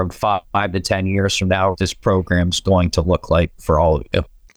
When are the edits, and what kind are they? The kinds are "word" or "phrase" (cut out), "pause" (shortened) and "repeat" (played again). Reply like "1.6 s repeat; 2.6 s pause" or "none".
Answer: 1.7 s phrase